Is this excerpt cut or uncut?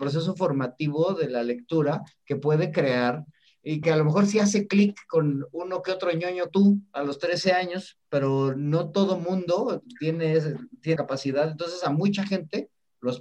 cut